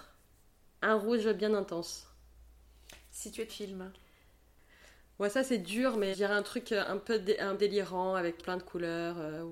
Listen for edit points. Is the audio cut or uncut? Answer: cut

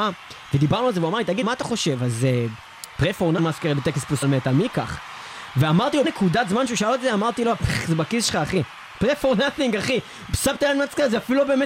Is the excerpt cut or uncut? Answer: cut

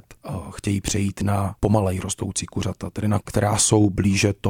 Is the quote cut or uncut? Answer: cut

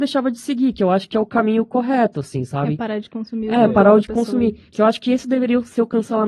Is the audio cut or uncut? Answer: uncut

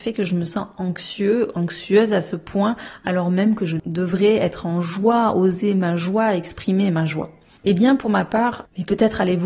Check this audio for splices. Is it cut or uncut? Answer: uncut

